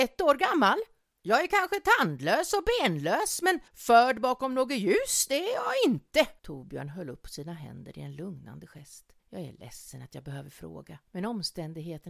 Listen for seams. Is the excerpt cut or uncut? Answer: cut